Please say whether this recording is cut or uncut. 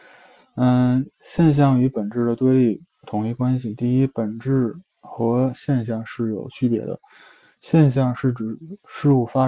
uncut